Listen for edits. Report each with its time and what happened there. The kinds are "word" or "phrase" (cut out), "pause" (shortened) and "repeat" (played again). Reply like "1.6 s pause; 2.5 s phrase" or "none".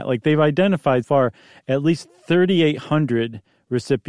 1.0 s word